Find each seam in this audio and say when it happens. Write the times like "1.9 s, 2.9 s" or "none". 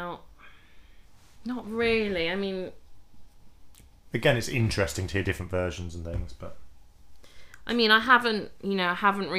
none